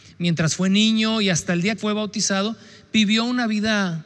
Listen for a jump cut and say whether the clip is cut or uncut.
cut